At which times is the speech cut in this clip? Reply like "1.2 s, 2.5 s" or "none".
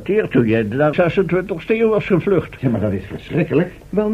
0.9 s